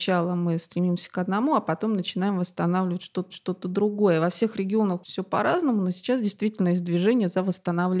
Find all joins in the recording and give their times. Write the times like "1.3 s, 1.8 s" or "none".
3.3 s, 5.0 s